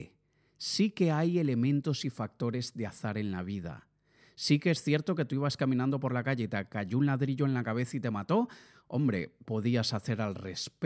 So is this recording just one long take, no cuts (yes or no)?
no